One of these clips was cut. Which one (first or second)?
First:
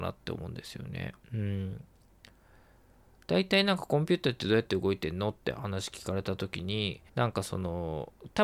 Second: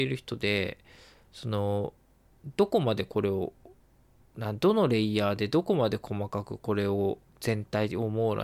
first